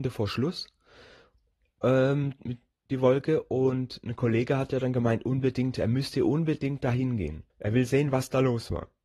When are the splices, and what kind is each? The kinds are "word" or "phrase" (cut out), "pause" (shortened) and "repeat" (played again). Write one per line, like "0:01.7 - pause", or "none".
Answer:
0:07.5 - pause